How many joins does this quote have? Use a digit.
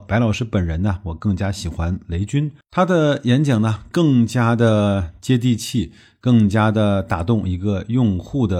0